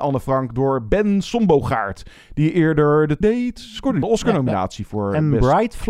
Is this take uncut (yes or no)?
no